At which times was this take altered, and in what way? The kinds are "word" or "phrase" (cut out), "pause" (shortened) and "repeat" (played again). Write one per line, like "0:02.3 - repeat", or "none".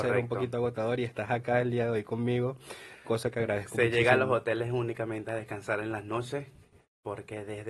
none